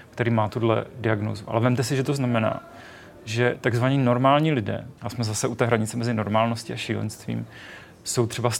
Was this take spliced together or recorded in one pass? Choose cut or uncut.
cut